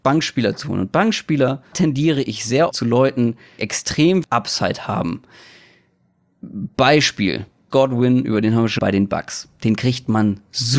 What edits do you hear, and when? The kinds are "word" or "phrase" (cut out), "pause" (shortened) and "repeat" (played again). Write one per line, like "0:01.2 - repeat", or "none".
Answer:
0:01.7 - word
0:02.7 - word
0:03.6 - word
0:04.2 - word
0:07.7 - word
0:08.8 - word